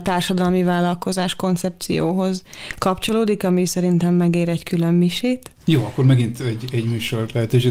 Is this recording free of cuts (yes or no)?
yes